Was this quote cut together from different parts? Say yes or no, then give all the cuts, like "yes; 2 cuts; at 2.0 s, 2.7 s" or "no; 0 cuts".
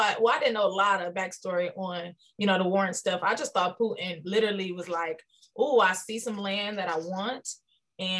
no; 0 cuts